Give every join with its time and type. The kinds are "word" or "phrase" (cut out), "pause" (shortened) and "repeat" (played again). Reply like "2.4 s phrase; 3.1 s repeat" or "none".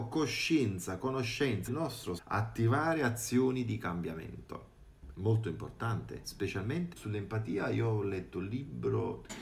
1.7 s word; 2.2 s word; 5.1 s word; 6.9 s word